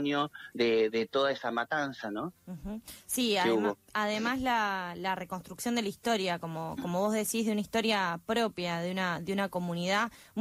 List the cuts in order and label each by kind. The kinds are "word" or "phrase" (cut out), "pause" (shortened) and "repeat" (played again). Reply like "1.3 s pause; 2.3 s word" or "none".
2.4 s pause